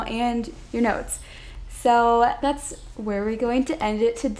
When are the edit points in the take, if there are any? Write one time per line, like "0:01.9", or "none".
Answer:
0:02.4